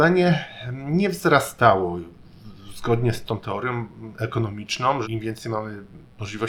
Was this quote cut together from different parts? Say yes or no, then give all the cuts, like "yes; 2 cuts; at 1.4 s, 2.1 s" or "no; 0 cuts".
yes; 2 cuts; at 3.2 s, 5.0 s